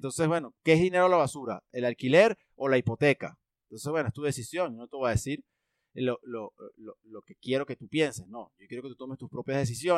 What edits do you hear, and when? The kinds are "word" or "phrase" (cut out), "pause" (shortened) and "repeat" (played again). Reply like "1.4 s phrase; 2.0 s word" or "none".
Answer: none